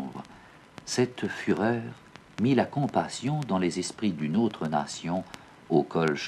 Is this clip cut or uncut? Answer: cut